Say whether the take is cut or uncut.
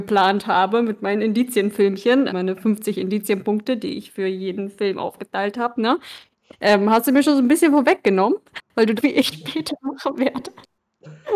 cut